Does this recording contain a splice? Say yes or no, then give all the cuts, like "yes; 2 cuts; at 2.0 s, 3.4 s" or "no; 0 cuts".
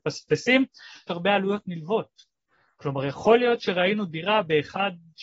yes; 1 cut; at 1.1 s